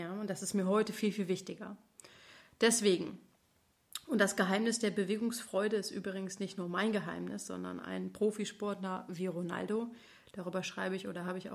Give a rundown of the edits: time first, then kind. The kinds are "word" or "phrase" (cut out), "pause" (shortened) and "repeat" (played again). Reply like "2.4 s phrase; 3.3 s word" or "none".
none

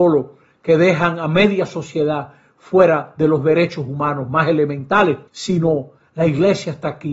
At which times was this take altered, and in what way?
5.3 s pause

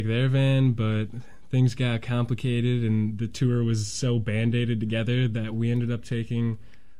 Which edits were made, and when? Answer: none

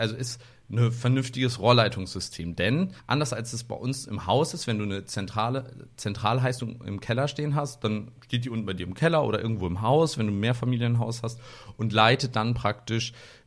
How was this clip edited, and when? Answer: 3.0 s pause

